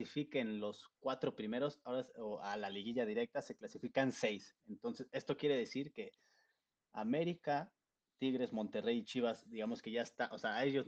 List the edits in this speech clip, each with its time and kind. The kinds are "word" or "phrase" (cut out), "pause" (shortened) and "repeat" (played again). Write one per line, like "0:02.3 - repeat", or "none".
none